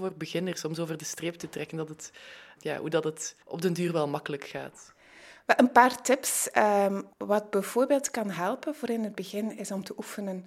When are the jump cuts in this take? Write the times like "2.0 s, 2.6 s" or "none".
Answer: 2.6 s, 3.4 s, 7.1 s